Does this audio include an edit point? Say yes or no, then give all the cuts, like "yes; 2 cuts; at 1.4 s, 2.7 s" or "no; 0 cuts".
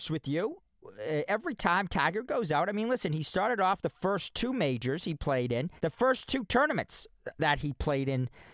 yes; 1 cut; at 5.8 s